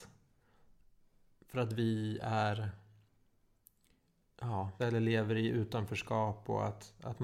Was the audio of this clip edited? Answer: yes; 1 cut; at 4.8 s

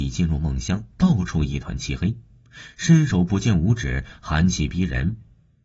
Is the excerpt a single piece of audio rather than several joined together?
yes; 0 cuts

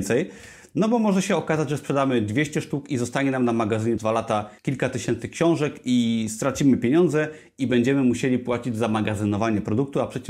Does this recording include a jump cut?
yes; 2 cuts; at 4.0 s, 4.6 s

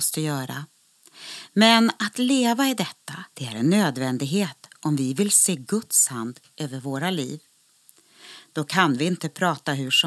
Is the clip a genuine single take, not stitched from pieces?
no; 1 cut; at 3.3 s

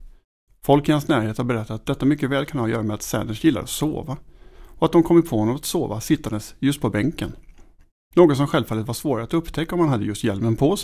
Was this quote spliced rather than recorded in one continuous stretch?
no; 0 cuts

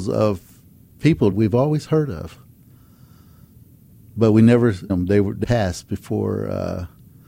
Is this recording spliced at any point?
yes; 3 cuts; at 1.3 s, 4.9 s, 5.4 s

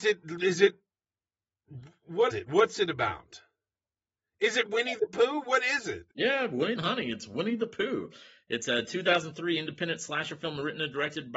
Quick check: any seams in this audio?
yes; 4 cuts; at 2.3 s, 4.7 s, 6.1 s, 6.8 s

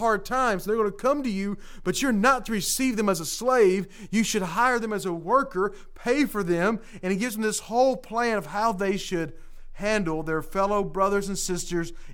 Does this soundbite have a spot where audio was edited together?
no; 0 cuts

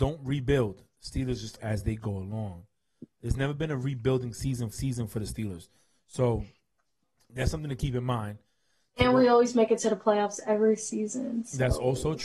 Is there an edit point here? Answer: yes; 2 cuts; at 1.6 s, 4.7 s

